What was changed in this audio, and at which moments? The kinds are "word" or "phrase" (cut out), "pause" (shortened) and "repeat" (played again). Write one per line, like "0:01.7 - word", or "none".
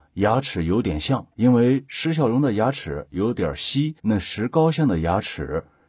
0:01.3 - pause
0:04.0 - pause